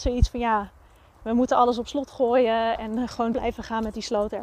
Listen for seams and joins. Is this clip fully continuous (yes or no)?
no